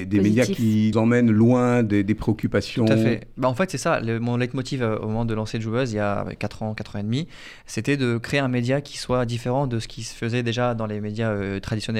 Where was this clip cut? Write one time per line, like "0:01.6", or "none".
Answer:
0:00.9